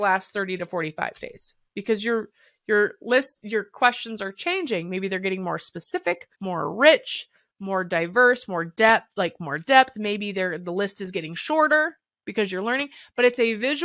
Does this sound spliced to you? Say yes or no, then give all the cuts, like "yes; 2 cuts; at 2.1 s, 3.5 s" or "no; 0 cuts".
yes; 1 cut; at 6.3 s